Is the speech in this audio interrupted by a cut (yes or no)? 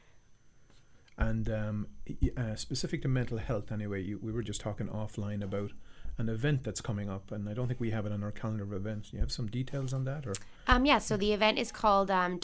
no